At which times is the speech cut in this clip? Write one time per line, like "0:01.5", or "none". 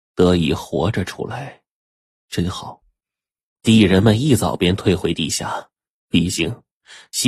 0:03.0